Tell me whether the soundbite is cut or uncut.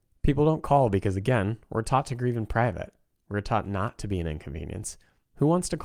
uncut